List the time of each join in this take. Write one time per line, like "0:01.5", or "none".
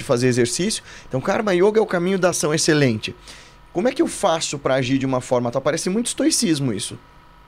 none